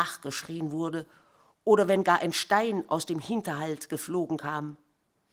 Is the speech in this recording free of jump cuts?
yes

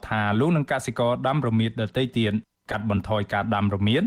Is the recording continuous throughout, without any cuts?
yes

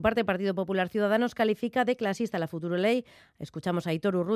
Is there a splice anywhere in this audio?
no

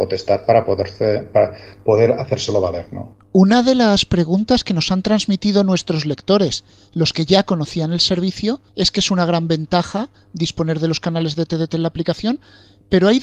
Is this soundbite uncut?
no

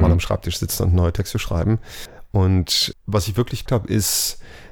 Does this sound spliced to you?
yes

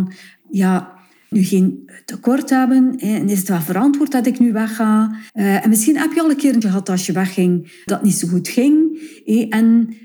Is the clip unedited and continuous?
no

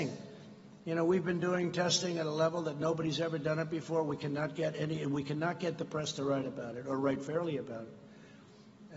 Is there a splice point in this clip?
no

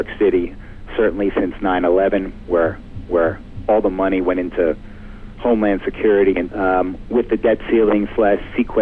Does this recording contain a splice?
yes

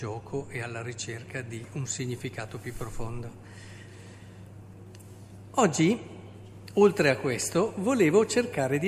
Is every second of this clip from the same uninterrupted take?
yes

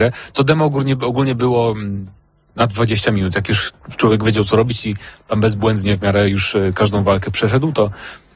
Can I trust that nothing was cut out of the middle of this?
yes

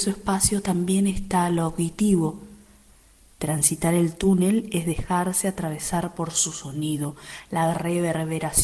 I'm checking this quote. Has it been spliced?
no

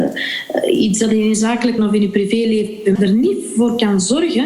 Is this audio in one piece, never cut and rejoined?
no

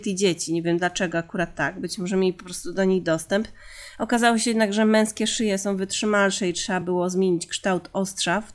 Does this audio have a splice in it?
no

